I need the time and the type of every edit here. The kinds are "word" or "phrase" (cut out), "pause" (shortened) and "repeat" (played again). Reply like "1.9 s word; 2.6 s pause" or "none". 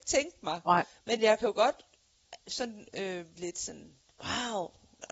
3.4 s word